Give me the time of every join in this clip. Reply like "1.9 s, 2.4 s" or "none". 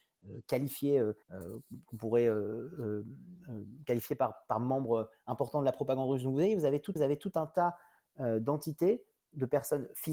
1.2 s, 7.0 s